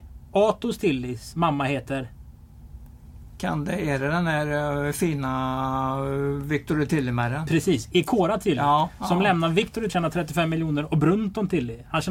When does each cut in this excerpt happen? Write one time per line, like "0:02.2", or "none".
0:09.9